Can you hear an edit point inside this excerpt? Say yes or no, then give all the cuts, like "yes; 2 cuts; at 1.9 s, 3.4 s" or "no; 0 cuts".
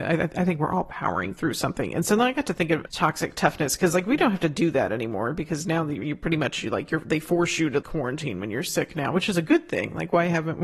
yes; 2 cuts; at 2.9 s, 7.8 s